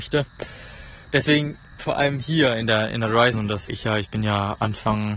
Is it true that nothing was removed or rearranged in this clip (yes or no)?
no